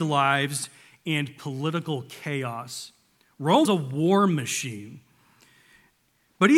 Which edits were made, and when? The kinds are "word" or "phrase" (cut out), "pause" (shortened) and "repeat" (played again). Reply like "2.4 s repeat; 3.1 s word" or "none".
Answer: 3.6 s word